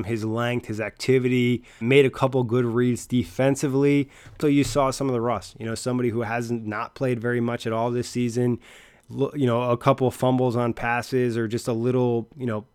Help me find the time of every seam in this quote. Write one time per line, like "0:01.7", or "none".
0:01.8
0:04.4

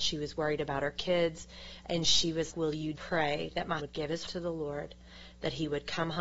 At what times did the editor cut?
0:02.5
0:03.0
0:03.8
0:04.3

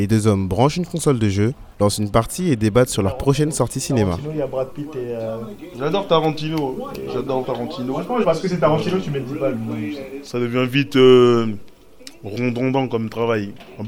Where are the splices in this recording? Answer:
0:01.7
0:07.4
0:08.2

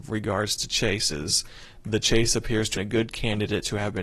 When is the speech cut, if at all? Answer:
0:02.7

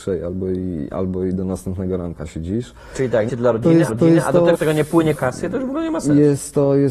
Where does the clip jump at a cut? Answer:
0:03.3
0:03.9
0:04.5
0:05.1

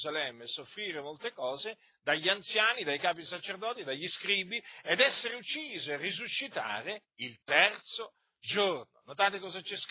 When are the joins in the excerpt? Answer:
none

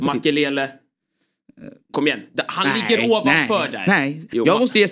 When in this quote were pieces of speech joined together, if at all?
none

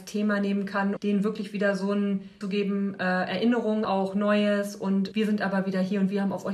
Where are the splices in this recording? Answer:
0:01.0
0:02.4
0:03.8
0:05.1

